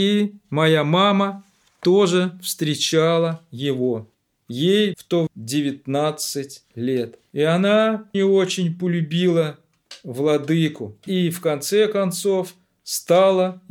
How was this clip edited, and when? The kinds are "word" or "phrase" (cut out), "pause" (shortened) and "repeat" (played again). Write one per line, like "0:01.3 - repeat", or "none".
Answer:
0:04.9 - word
0:05.3 - word
0:08.1 - word